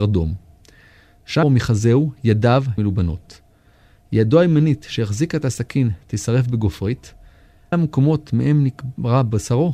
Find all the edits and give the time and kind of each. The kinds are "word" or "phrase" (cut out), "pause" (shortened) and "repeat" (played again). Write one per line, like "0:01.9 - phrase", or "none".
0:01.4 - phrase
0:02.8 - phrase
0:07.7 - word